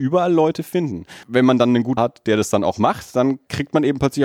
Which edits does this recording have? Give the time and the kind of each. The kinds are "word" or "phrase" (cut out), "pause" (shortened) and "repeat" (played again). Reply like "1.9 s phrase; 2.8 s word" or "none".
1.2 s pause; 2.0 s word